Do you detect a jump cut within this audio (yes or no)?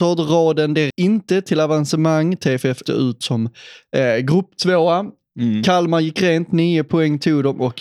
yes